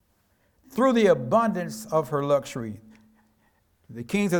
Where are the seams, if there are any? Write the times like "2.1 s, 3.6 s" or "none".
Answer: none